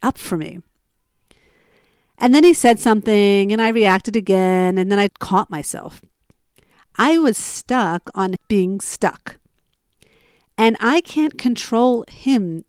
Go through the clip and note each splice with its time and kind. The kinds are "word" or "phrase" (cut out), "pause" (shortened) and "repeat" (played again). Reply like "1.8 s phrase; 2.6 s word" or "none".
5.1 s word; 8.4 s word